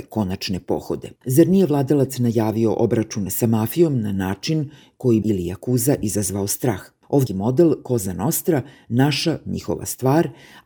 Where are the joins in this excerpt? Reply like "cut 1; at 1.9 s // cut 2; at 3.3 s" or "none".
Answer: cut 1; at 1.2 s // cut 2; at 5.2 s // cut 3; at 7.3 s